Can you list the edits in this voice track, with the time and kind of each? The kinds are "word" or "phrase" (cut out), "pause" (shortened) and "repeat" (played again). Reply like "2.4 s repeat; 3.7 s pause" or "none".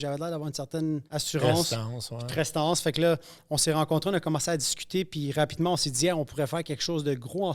1.1 s pause